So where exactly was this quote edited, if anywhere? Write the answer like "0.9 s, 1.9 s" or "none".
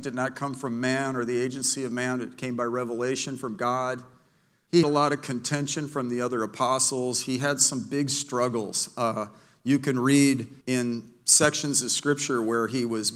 4.8 s, 10.6 s

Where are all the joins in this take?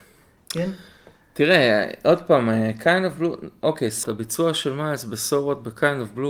4.0 s

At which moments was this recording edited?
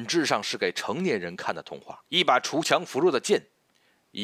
2.1 s

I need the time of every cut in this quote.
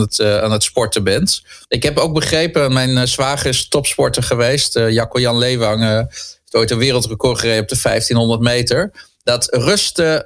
1.6 s

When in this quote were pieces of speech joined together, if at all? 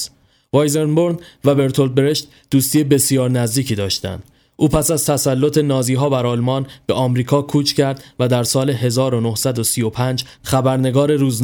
none

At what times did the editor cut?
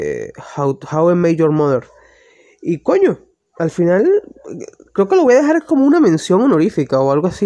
none

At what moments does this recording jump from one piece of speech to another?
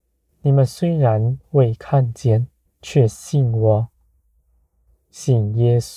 2.7 s

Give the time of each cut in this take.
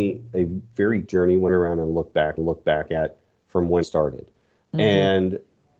1.1 s, 1.5 s, 2.4 s, 3.8 s

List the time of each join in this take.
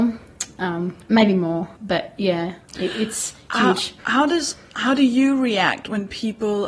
1.0 s, 1.8 s, 4.0 s

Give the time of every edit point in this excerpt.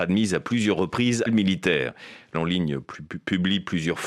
1.3 s, 2.3 s

